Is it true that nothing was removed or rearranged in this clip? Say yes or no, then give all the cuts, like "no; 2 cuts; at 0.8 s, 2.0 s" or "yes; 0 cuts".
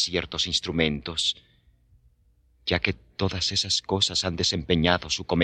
yes; 0 cuts